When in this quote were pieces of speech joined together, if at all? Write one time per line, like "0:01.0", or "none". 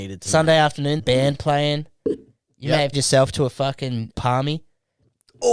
0:01.0
0:02.9
0:04.1